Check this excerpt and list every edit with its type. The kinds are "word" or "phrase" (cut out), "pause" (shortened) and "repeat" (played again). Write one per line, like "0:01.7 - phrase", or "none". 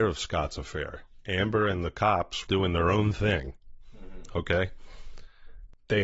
0:02.5 - word